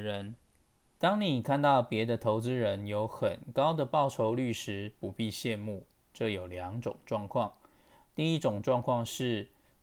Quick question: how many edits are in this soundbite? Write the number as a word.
one